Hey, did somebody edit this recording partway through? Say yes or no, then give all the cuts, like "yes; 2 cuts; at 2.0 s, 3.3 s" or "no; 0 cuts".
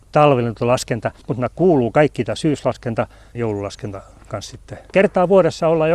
yes; 3 cuts; at 1.2 s, 3.3 s, 4.9 s